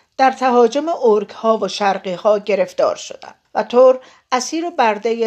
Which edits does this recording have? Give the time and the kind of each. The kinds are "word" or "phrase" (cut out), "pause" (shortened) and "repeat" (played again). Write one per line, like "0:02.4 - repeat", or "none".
0:03.4 - pause